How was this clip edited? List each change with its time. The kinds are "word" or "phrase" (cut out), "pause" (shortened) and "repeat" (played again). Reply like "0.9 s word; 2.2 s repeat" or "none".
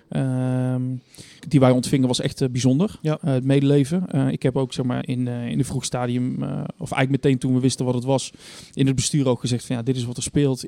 1.4 s word; 5.0 s word